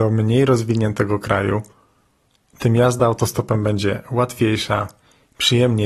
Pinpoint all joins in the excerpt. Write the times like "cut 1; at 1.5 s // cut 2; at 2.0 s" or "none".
none